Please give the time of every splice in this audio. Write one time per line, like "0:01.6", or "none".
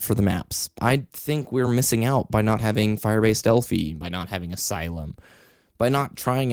none

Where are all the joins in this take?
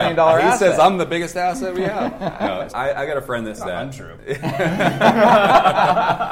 0:02.7
0:03.6

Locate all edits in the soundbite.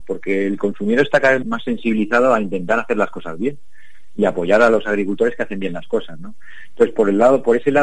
0:01.4

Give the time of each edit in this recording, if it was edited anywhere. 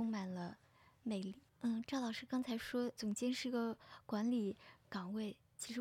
0:01.5

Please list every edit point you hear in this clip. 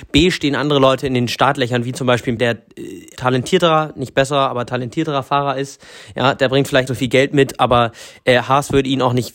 0:02.4
0:03.2
0:06.9

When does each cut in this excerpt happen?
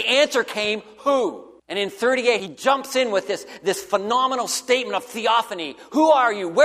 0:01.6
0:02.4

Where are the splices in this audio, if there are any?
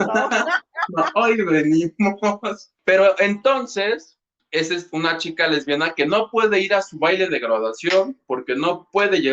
0:02.8
0:04.4

